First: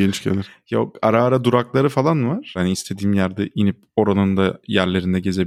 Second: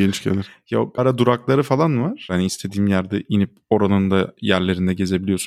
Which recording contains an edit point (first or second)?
second